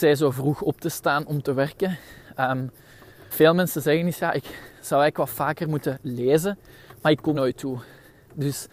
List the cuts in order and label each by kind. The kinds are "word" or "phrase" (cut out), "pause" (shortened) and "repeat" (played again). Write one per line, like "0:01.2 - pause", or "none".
0:03.3 - word
0:07.3 - word